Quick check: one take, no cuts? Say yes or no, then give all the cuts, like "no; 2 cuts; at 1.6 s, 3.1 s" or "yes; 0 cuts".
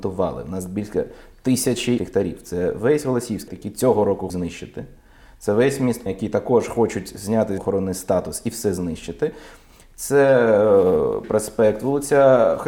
no; 6 cuts; at 2.0 s, 3.5 s, 4.3 s, 6.1 s, 7.6 s, 11.2 s